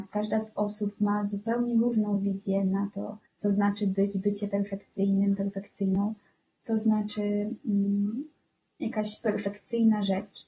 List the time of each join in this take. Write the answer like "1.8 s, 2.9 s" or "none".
3.3 s, 8.6 s